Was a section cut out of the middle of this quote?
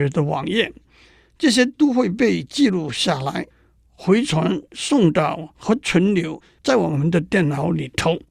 no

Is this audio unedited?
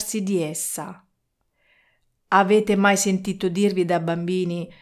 yes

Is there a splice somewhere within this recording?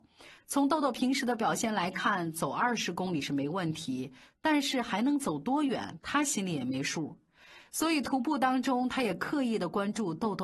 no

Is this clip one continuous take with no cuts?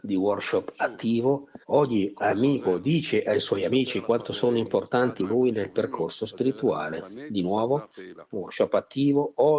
no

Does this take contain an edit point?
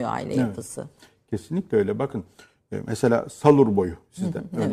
no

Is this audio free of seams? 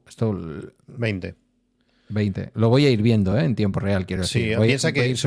yes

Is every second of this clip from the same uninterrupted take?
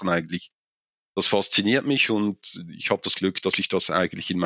yes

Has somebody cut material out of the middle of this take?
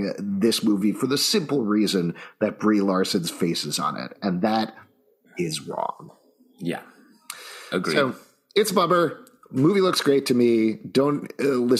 no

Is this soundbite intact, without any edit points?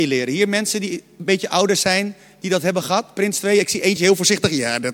yes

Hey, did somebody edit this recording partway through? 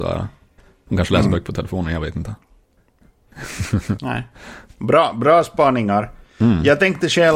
no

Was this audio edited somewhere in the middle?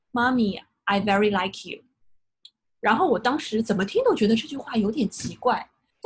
no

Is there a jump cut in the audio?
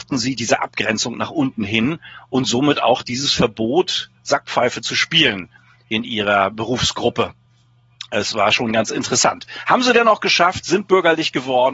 no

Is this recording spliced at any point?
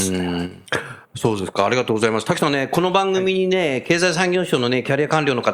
yes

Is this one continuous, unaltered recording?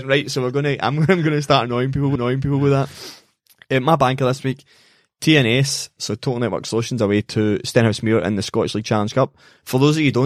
no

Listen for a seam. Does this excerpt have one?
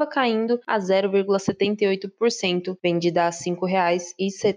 no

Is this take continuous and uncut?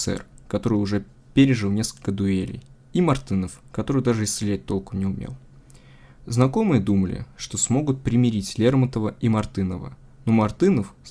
yes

